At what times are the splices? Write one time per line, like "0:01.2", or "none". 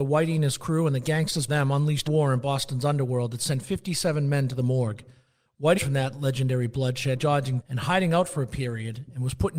0:01.5
0:02.1
0:05.8
0:07.2
0:07.6